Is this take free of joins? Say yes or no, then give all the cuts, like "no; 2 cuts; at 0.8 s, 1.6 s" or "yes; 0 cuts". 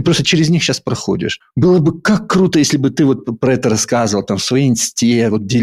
yes; 0 cuts